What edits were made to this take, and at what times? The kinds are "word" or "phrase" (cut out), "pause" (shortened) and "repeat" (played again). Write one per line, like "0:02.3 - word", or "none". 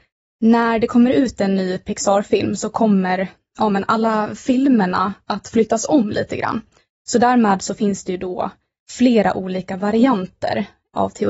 none

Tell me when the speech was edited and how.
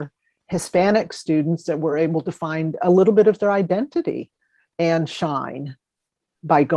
none

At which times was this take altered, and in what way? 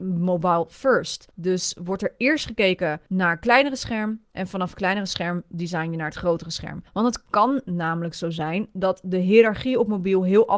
0:01.3 - pause
0:03.1 - pause
0:06.9 - pause

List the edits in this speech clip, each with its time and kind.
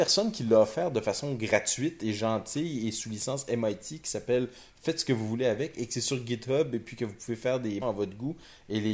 0:07.8 - word

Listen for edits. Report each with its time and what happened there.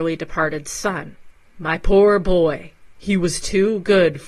0:02.9 - pause

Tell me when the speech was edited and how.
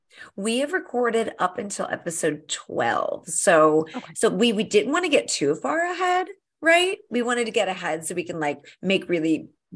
none

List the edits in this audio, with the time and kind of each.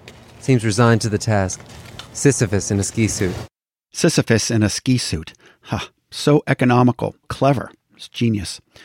0:07.2 - word

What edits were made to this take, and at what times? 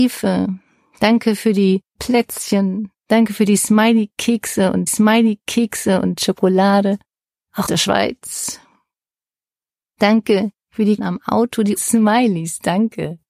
0:02.0 - word
0:03.0 - pause
0:04.9 - repeat
0:07.7 - word
0:10.6 - pause
0:11.0 - phrase
0:11.8 - word

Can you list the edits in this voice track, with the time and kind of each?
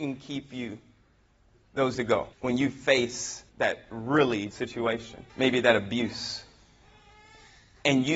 0:01.9 - word
0:02.3 - pause
0:03.5 - pause
0:04.5 - word
0:05.3 - pause

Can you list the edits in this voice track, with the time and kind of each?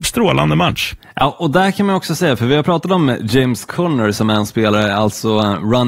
none

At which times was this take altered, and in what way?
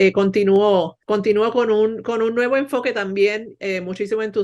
0:01.0 - pause

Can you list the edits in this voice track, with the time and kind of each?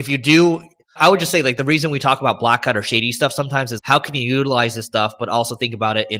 0:03.8 - word

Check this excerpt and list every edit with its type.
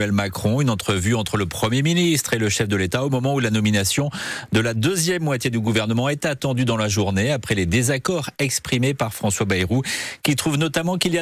none

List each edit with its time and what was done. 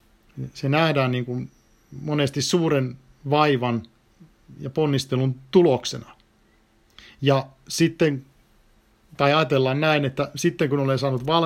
none

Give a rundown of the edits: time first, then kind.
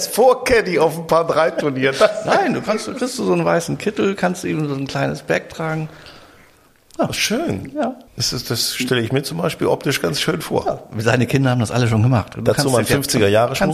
0:08.1 - pause

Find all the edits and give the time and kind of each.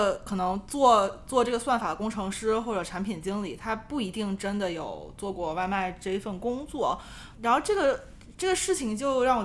0:07.3 - word

